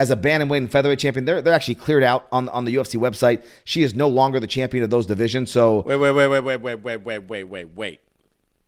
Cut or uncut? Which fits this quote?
uncut